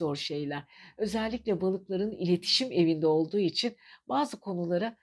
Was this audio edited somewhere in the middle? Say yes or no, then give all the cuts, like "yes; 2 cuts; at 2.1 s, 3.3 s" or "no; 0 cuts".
no; 0 cuts